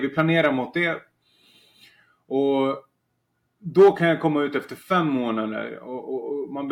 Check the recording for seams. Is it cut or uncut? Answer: uncut